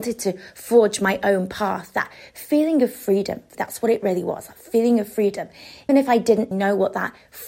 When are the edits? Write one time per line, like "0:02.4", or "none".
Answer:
0:03.5
0:05.9
0:06.5

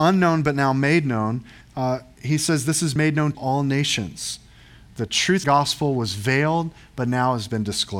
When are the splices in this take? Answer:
0:01.6
0:03.0
0:03.3
0:05.4

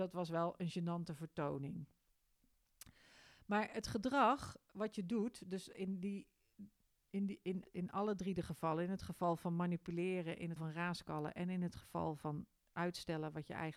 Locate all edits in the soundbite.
0:07.6
0:10.6

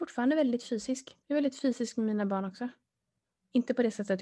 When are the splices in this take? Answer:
0:01.2

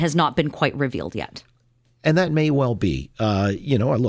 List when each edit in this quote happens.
none

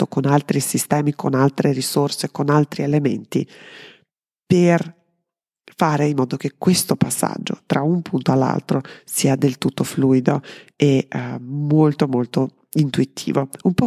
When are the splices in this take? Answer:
none

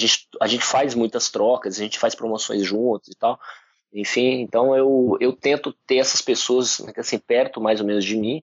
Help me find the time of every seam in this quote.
none

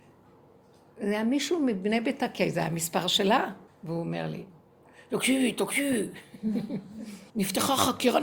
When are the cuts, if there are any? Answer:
0:03.7
0:07.3

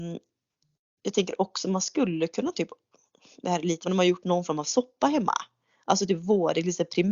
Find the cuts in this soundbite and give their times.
0:03.8

